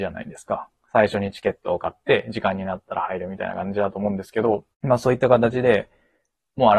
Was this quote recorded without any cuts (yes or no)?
no